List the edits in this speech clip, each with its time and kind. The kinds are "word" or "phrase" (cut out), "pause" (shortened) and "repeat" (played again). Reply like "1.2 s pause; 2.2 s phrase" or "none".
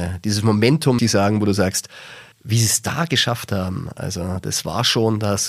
1.0 s word; 2.3 s pause